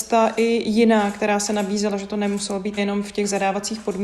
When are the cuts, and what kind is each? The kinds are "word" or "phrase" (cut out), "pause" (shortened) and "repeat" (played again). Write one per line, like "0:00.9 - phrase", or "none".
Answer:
0:02.8 - word